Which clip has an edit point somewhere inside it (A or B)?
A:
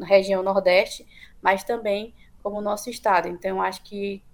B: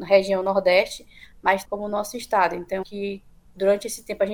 B